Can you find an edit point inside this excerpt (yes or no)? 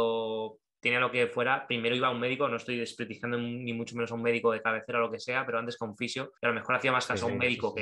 yes